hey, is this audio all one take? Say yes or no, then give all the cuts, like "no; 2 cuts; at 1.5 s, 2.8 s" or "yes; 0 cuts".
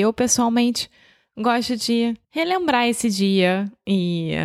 no; 1 cut; at 2.2 s